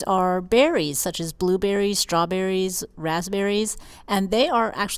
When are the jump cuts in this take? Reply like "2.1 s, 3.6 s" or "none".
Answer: none